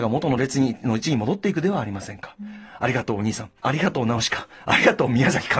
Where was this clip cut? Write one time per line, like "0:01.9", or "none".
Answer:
0:03.6